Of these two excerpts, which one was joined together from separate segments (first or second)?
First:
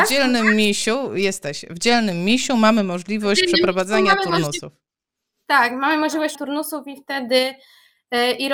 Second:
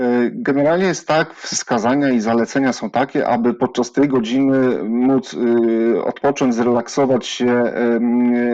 first